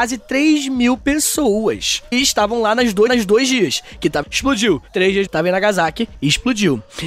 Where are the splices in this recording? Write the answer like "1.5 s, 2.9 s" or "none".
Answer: 2.1 s, 3.1 s, 4.2 s, 5.3 s